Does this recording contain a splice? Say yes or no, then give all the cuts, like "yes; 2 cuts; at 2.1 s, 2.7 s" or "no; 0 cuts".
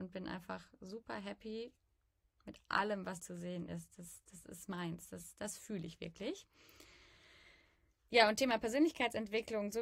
yes; 1 cut; at 3.2 s